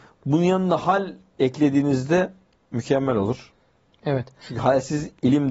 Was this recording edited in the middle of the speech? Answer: no; 0 cuts

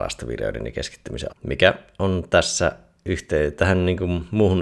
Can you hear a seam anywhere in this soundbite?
yes; 1 cut; at 1.3 s

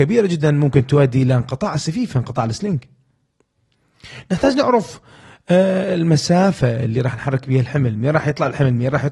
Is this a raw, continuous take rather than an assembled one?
yes; 0 cuts

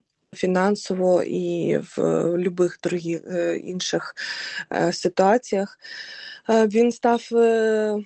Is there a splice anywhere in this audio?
no; 0 cuts

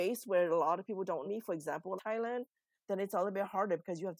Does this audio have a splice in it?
yes; 2 cuts; at 1.2 s, 2.0 s

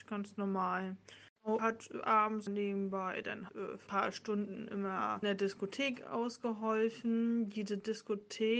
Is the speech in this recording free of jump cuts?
no; 5 cuts; at 1.6 s, 2.5 s, 3.5 s, 3.9 s, 5.2 s

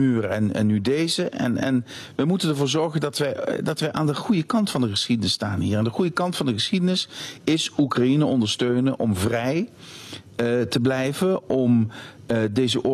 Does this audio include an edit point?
no; 0 cuts

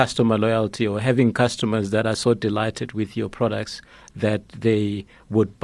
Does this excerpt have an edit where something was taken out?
no; 0 cuts

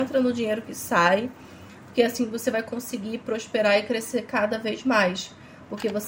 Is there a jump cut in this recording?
no; 0 cuts

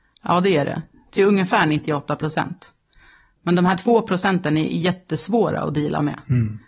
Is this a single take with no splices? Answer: yes; 0 cuts

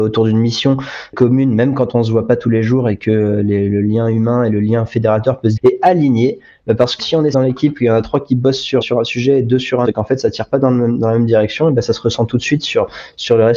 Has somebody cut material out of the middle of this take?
yes; 5 cuts; at 5.6 s, 7.0 s, 7.3 s, 8.8 s, 9.8 s

